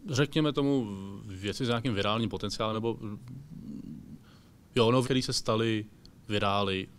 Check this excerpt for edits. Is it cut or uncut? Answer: cut